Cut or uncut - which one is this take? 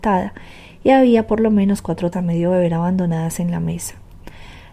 cut